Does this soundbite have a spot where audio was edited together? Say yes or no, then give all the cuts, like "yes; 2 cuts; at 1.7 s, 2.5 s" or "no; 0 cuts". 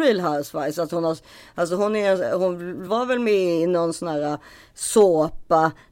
no; 0 cuts